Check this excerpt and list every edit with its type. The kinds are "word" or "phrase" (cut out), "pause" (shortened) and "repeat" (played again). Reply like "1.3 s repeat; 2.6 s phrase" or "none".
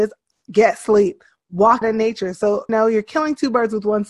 1.8 s word; 2.7 s word